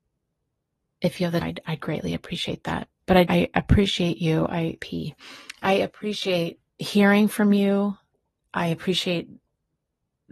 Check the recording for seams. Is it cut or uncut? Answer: cut